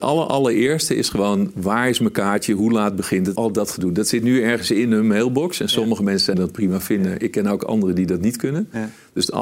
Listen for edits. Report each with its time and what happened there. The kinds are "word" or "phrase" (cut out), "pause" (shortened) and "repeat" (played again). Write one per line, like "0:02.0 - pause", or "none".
0:03.4 - word
0:06.3 - phrase